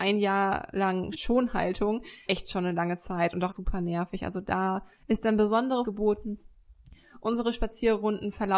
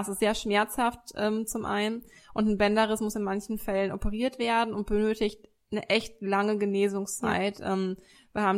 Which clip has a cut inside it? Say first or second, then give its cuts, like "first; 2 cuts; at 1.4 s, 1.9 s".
first; 5 cuts; at 1.1 s, 2.3 s, 3.5 s, 4.9 s, 5.8 s